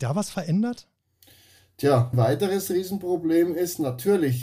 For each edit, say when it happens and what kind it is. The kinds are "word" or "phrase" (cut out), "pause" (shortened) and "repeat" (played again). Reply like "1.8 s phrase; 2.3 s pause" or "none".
2.1 s word